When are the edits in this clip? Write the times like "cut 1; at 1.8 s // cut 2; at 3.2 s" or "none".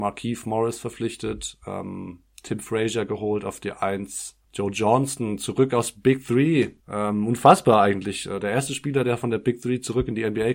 cut 1; at 4.4 s // cut 2; at 6.8 s